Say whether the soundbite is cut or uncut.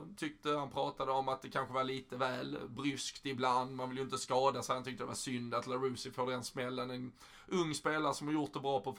uncut